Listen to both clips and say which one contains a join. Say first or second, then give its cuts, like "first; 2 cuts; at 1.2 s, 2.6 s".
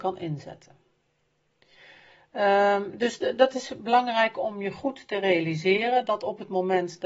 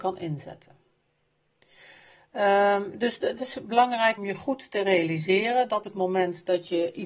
second; 3 cuts; at 3.4 s, 4.2 s, 5.8 s